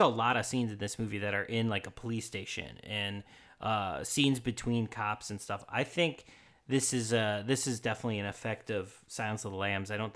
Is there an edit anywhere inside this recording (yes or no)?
no